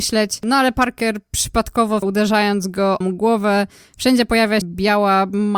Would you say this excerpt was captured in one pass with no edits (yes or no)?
no